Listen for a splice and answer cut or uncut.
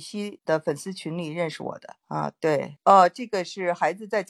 uncut